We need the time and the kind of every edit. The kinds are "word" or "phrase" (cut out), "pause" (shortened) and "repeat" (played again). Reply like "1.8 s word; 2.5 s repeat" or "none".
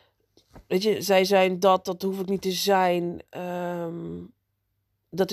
3.3 s pause